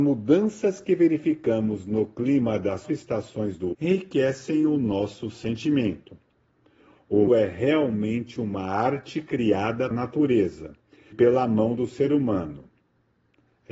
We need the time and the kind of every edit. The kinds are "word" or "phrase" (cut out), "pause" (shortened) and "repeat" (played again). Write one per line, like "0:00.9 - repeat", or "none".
0:02.8 - word
0:03.7 - word
0:07.3 - word
0:09.9 - word
0:11.1 - word